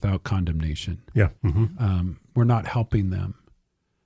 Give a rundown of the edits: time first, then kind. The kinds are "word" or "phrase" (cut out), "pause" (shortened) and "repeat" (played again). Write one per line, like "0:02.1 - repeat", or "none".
0:01.4 - pause